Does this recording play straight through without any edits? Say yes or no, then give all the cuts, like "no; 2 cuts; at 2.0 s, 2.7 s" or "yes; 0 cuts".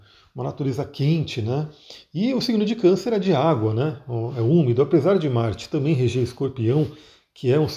yes; 0 cuts